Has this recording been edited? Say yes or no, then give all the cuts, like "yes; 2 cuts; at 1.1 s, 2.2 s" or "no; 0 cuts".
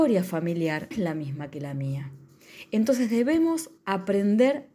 yes; 2 cuts; at 0.9 s, 3.8 s